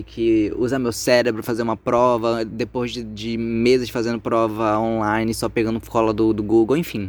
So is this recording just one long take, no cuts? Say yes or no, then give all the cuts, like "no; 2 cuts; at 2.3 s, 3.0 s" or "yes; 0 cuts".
yes; 0 cuts